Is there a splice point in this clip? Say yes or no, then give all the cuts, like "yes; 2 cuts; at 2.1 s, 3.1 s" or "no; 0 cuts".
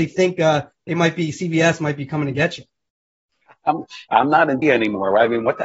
yes; 1 cut; at 4.6 s